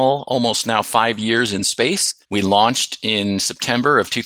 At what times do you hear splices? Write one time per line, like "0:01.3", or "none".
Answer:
0:02.2